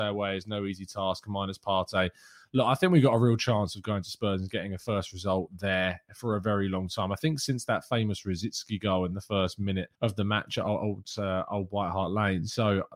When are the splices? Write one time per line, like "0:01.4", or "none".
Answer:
0:09.9